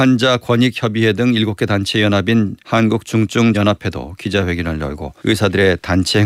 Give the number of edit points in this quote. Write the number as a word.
three